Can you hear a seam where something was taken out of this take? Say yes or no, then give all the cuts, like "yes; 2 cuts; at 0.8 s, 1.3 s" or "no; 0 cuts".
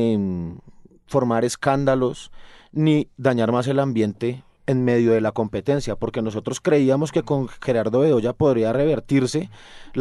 no; 0 cuts